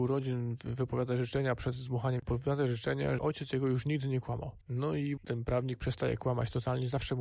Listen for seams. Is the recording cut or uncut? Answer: cut